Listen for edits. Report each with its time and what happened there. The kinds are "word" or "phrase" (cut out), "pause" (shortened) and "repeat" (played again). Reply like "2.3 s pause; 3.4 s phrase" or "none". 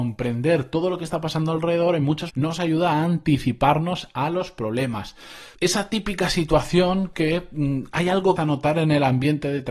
2.3 s word; 5.5 s pause; 8.4 s word